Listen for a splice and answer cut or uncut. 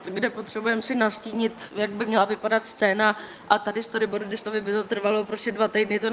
uncut